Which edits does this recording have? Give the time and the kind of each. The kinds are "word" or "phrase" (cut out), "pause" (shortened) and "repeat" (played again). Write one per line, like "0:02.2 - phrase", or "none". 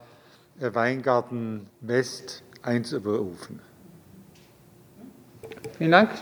0:01.7 - pause